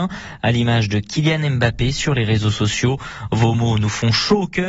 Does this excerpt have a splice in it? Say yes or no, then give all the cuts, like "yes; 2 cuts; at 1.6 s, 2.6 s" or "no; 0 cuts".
no; 0 cuts